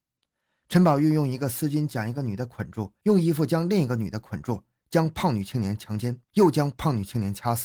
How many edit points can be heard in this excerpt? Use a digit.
1